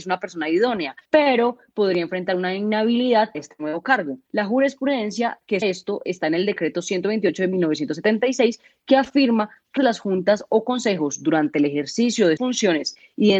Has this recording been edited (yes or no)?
yes